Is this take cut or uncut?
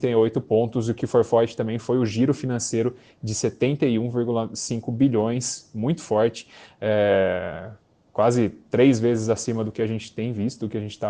uncut